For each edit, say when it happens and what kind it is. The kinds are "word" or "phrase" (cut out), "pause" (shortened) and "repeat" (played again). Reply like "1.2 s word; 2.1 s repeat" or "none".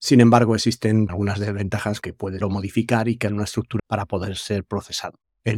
1.1 s word; 2.0 s word; 2.4 s phrase; 3.3 s word; 3.8 s word